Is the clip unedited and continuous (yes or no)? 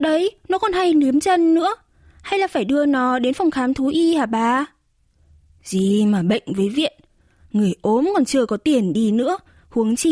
yes